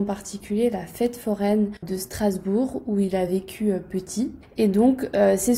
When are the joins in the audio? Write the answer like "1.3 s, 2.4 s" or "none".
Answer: none